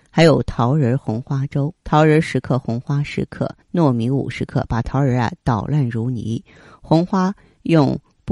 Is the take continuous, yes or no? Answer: no